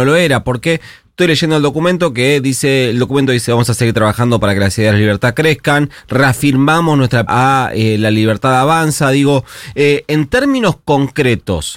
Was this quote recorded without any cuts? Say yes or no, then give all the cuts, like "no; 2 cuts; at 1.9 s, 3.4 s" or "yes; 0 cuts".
no; 1 cut; at 7.3 s